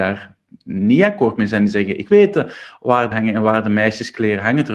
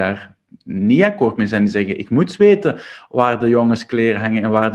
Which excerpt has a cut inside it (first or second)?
first